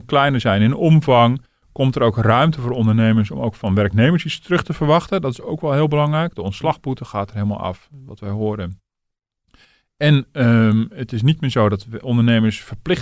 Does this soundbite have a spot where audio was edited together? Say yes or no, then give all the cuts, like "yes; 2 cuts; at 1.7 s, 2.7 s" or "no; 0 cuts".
no; 0 cuts